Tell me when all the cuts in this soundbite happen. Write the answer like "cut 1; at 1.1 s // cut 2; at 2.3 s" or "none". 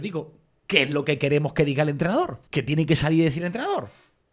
cut 1; at 2.5 s